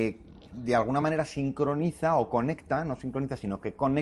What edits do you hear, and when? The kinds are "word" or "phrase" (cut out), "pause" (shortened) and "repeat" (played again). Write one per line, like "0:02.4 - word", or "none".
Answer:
none